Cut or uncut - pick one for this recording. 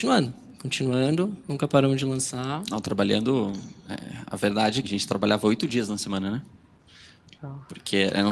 cut